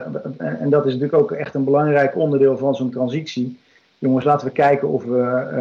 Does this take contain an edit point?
no; 0 cuts

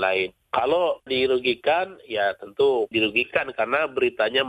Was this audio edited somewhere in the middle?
yes; 2 cuts; at 1.1 s, 2.9 s

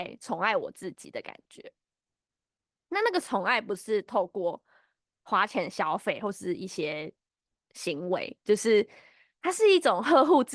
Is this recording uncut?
yes; 0 cuts

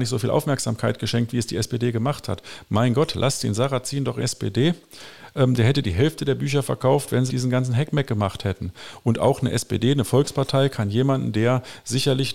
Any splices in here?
yes; 2 cuts; at 4.2 s, 7.3 s

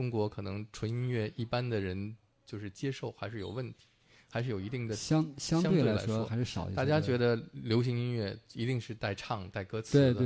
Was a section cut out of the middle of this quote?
no; 0 cuts

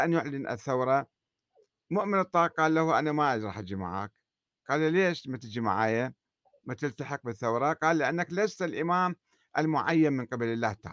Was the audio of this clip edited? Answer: no; 0 cuts

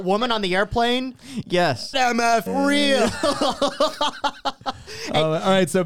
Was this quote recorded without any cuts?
no; 2 cuts; at 1.9 s, 2.5 s

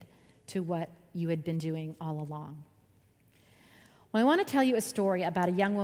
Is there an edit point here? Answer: no; 0 cuts

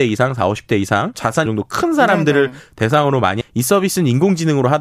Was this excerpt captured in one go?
no; 3 cuts; at 1.1 s, 1.5 s, 3.4 s

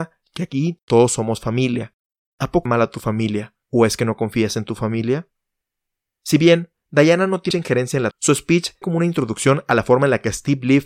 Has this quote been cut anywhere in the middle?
yes; 5 cuts; at 2.7 s, 3.6 s, 7.5 s, 8.1 s, 8.8 s

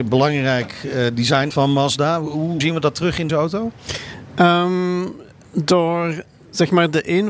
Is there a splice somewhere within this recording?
yes; 3 cuts; at 1.5 s, 2.6 s, 3.3 s

